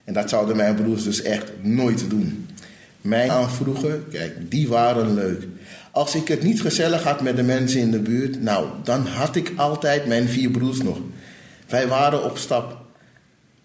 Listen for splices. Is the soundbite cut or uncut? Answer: cut